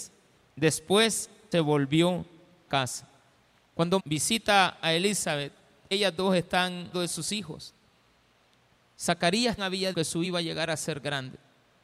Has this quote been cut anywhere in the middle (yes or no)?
yes